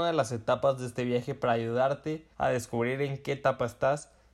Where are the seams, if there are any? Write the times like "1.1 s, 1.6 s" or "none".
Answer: 2.3 s